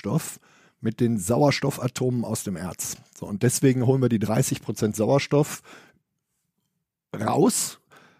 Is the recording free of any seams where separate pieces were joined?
yes; 0 cuts

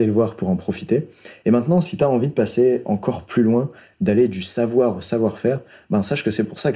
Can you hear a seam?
no; 0 cuts

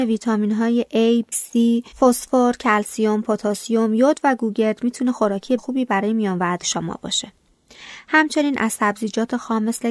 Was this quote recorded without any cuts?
no; 4 cuts; at 1.3 s, 1.9 s, 5.6 s, 6.6 s

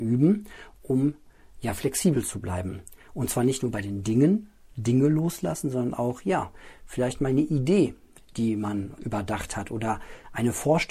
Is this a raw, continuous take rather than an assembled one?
no; 1 cut; at 9.0 s

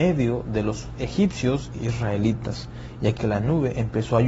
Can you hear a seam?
yes; 2 cuts; at 1.8 s, 3.2 s

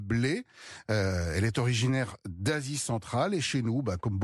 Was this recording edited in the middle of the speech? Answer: no; 0 cuts

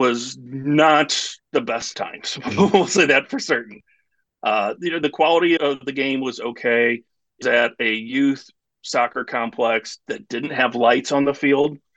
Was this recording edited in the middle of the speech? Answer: yes; 3 cuts; at 1.9 s, 5.6 s, 7.4 s

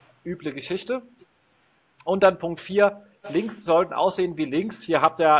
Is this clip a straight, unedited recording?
yes; 0 cuts

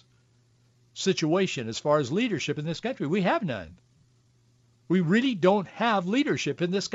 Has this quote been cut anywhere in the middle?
no; 0 cuts

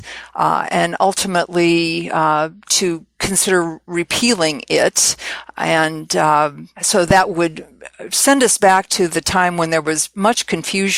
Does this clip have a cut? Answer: no; 0 cuts

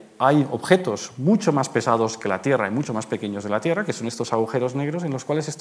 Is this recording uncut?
yes; 0 cuts

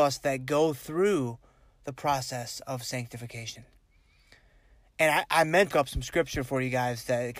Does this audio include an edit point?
yes; 1 cut; at 5.7 s

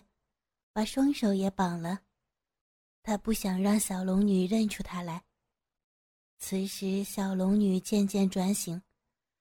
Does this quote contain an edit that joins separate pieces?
no; 0 cuts

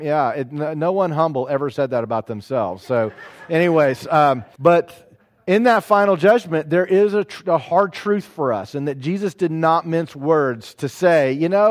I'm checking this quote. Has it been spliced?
yes; 1 cut; at 4.5 s

